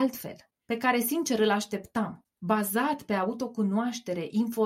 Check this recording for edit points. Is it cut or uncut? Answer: uncut